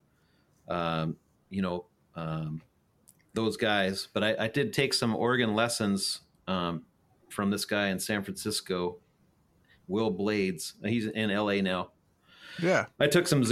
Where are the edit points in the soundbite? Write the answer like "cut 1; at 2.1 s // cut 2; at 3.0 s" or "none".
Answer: none